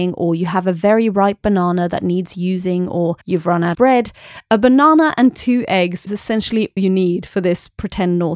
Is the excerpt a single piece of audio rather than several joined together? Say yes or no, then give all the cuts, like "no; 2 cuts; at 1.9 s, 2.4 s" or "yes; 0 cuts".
no; 4 cuts; at 3.2 s, 3.7 s, 6.1 s, 6.8 s